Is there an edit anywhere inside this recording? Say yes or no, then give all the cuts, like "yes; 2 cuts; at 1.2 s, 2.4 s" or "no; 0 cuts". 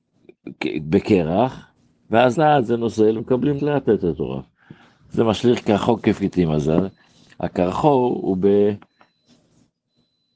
yes; 3 cuts; at 2.3 s, 3.2 s, 3.6 s